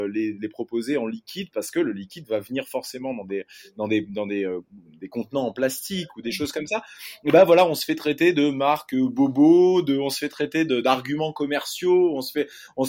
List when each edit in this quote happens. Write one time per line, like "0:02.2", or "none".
none